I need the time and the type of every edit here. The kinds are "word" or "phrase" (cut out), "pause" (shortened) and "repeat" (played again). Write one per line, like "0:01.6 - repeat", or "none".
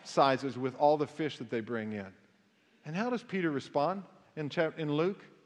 none